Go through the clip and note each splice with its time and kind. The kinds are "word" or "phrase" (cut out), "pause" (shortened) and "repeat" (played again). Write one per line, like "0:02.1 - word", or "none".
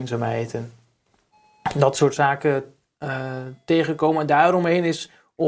none